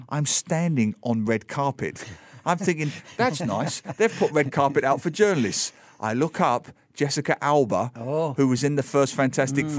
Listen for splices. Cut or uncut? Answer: uncut